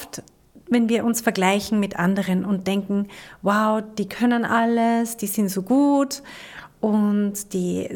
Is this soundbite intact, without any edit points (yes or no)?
yes